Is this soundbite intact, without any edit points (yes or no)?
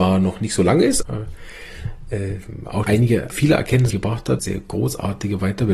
no